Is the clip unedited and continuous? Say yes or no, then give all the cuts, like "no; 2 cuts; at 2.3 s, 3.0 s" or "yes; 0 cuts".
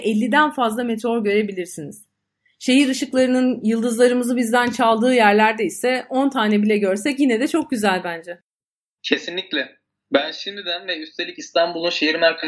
yes; 0 cuts